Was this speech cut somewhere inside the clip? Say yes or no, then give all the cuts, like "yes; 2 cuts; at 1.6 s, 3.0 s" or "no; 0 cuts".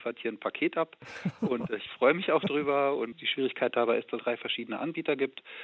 yes; 1 cut; at 4.2 s